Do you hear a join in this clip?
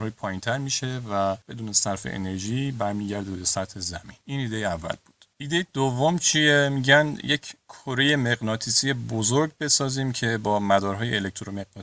no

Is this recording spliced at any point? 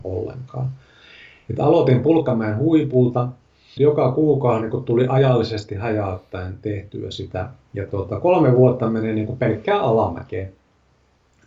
yes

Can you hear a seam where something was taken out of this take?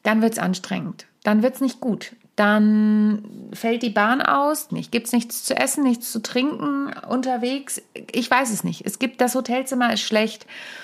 yes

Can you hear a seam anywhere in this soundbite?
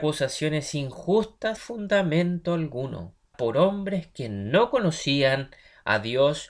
yes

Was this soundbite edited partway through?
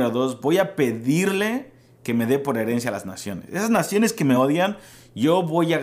no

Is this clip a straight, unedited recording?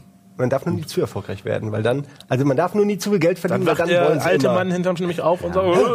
no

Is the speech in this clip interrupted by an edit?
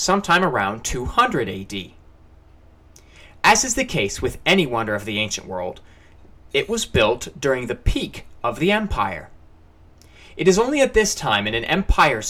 no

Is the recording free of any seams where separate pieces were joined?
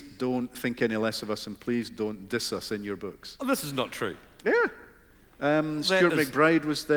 yes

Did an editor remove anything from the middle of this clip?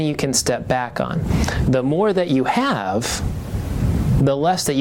no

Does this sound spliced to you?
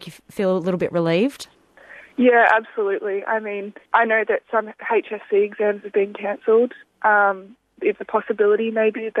yes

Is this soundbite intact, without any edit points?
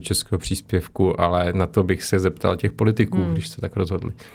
yes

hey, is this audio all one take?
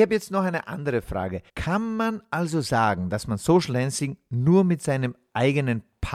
no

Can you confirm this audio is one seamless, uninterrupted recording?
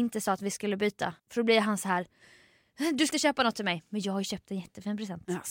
no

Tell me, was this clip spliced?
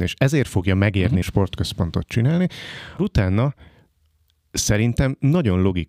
yes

